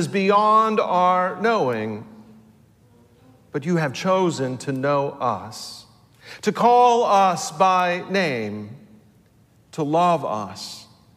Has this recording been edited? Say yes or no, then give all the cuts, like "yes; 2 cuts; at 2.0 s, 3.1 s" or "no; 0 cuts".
no; 0 cuts